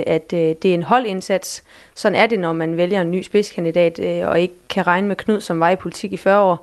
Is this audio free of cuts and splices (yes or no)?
yes